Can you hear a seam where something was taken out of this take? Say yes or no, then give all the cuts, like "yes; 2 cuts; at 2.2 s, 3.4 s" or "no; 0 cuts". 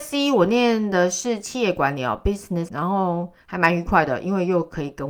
yes; 1 cut; at 2.7 s